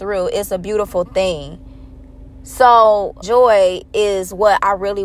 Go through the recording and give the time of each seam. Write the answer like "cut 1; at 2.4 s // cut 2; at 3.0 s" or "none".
cut 1; at 3.2 s